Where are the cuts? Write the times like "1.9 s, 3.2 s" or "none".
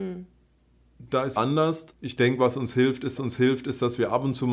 1.4 s, 1.9 s, 3.2 s